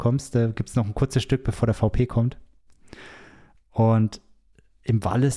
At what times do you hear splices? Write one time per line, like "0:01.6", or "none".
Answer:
none